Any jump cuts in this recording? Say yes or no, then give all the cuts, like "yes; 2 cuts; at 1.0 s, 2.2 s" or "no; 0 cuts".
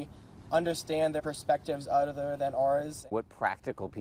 yes; 1 cut; at 1.2 s